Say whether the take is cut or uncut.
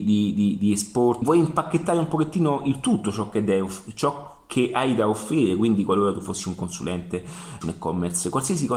cut